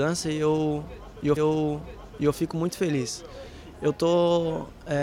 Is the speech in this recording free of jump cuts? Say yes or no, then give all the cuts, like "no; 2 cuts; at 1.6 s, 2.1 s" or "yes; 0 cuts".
no; 1 cut; at 1.4 s